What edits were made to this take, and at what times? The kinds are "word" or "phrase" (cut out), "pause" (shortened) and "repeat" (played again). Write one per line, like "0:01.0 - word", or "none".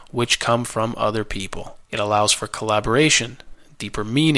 0:01.8 - pause